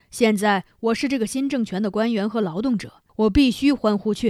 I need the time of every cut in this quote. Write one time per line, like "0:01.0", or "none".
0:03.1

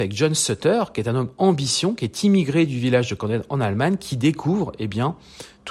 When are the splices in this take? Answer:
none

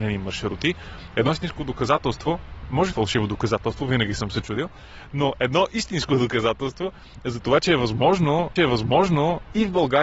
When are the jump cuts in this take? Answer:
0:02.9
0:08.6

